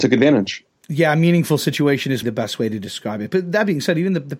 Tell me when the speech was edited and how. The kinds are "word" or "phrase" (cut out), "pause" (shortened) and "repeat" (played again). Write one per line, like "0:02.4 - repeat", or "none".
0:02.2 - word